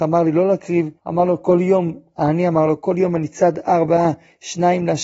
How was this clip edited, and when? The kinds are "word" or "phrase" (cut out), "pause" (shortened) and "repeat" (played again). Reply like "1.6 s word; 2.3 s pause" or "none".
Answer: 1.0 s pause